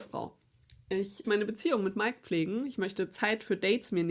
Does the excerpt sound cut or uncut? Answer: cut